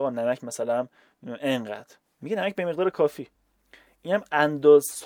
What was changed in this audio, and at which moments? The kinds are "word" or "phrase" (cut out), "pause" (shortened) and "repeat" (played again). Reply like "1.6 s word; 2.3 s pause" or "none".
none